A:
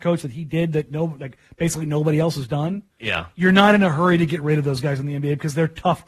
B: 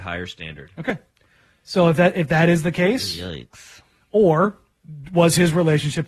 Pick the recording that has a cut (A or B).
A